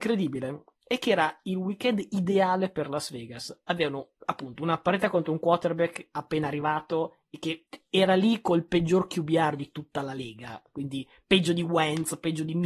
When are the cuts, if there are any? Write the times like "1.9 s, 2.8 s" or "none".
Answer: 4.2 s